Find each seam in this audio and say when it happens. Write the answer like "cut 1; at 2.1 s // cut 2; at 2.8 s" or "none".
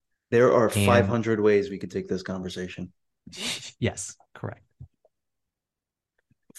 cut 1; at 4.3 s